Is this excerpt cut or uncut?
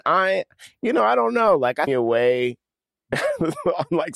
cut